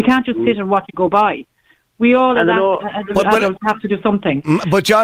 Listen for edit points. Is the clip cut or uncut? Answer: uncut